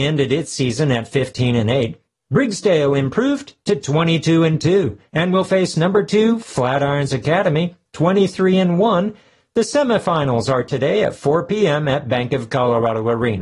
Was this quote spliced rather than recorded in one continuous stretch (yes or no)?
no